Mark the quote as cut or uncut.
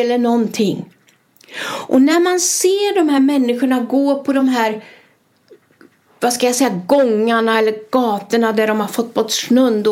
uncut